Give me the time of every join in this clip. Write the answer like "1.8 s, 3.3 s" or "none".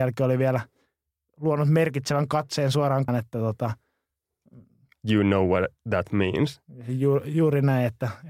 3.1 s